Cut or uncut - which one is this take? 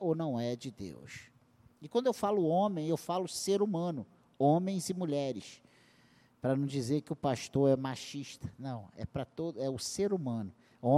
uncut